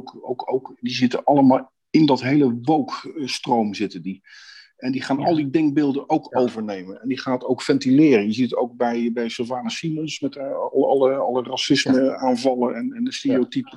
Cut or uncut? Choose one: uncut